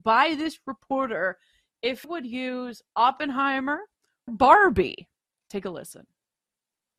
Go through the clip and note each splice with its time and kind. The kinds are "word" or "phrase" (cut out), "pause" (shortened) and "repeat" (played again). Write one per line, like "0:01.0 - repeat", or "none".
0:02.0 - word
0:04.3 - word